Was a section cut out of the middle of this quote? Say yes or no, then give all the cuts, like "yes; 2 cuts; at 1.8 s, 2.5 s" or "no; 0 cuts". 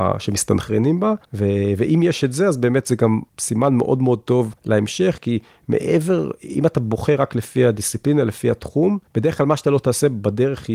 yes; 4 cuts; at 1.2 s, 3.3 s, 4.6 s, 9.1 s